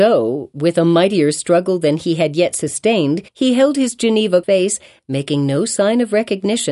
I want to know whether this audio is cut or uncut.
cut